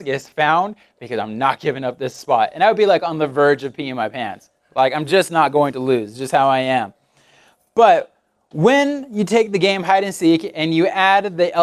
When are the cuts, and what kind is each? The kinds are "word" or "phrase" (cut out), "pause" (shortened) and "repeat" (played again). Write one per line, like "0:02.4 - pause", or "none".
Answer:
none